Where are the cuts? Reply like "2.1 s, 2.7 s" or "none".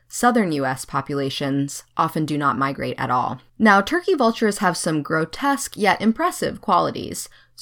3.5 s